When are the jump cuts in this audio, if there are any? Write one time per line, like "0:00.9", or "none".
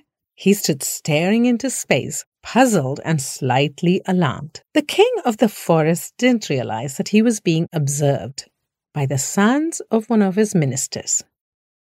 0:02.3
0:04.7
0:08.6

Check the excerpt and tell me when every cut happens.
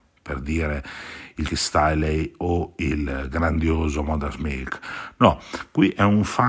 0:01.5

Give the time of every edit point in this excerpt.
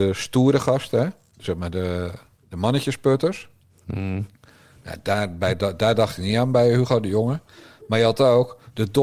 none

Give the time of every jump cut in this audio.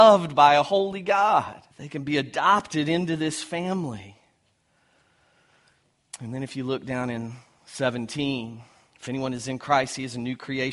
0:01.7

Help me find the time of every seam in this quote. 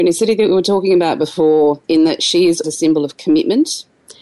0:01.8
0:02.6

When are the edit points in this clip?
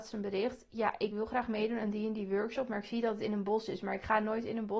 none

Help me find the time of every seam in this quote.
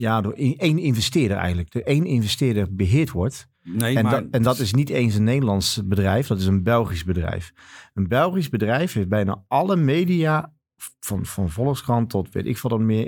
none

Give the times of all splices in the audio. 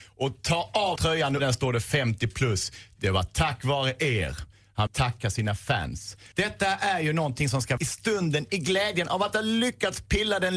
0:01.0
0:01.4
0:04.9
0:06.3
0:07.8

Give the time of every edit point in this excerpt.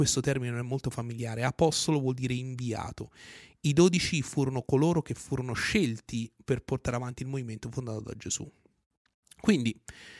none

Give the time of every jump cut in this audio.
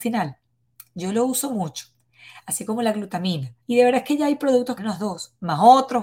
0:03.6
0:04.8

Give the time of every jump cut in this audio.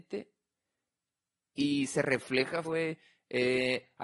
0:02.6

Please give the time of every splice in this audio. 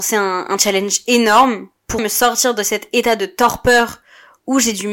0:02.0

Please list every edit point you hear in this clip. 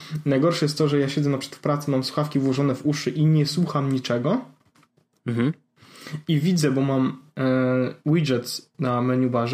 none

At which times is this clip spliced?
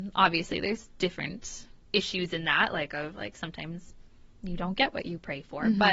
none

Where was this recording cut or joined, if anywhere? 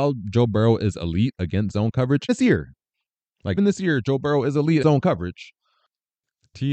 0:02.3
0:03.6
0:04.8

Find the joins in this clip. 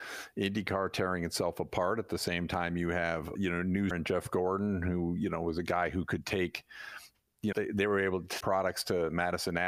0:03.4
0:03.9
0:07.5
0:08.4

